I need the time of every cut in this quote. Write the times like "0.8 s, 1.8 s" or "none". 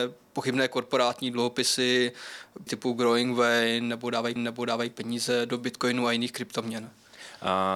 2.7 s, 4.4 s